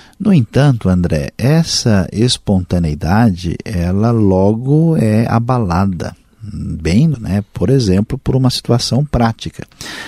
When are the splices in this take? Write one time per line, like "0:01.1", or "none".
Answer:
0:07.1